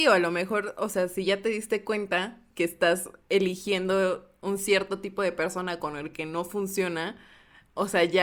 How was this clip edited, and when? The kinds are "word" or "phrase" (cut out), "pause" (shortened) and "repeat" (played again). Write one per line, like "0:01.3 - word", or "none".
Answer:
none